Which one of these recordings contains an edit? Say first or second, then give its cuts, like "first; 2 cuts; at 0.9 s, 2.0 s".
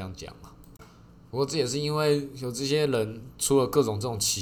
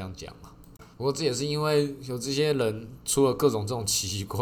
second; 1 cut; at 0.9 s